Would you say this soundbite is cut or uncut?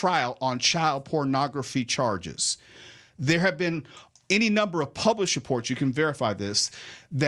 uncut